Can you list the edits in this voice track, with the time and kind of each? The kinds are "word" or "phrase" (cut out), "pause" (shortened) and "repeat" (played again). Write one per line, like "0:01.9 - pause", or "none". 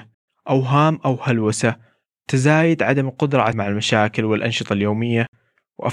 0:03.5 - word